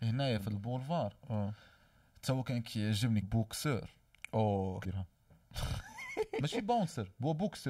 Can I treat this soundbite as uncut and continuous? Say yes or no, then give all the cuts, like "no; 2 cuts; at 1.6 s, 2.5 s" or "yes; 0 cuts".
no; 2 cuts; at 3.2 s, 4.8 s